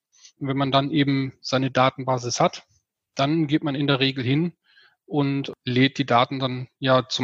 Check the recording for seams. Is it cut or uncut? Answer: uncut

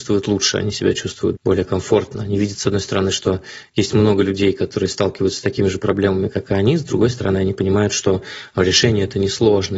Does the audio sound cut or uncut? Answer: cut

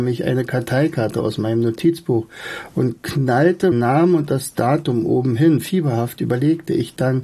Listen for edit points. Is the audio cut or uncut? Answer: cut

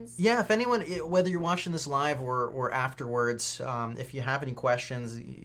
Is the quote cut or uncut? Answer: uncut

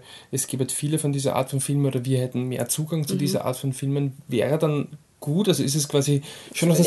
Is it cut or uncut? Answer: uncut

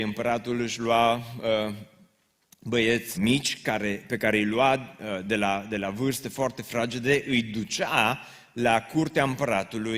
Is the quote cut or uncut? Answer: cut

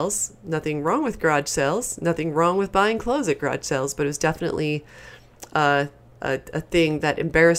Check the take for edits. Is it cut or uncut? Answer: uncut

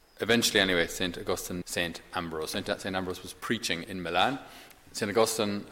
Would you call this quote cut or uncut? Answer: cut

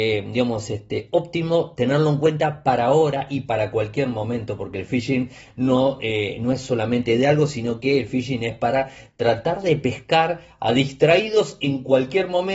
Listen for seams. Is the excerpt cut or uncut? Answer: uncut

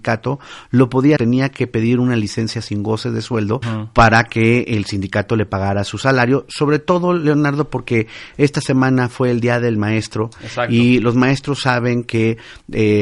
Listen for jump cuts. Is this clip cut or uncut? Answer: cut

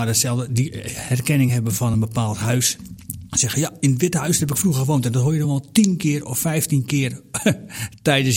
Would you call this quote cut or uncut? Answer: uncut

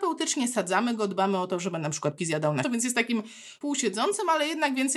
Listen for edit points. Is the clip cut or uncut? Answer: cut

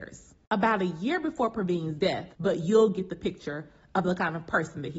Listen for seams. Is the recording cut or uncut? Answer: cut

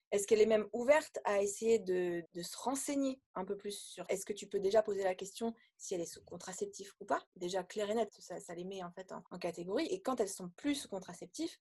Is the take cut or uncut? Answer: cut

